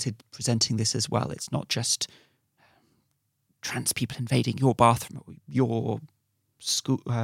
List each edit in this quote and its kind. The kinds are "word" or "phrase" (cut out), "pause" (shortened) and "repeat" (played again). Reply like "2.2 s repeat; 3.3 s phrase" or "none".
none